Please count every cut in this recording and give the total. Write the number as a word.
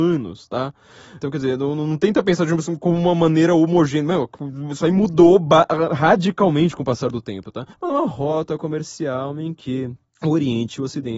two